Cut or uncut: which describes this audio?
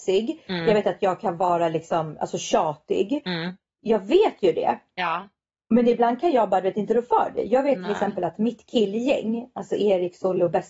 uncut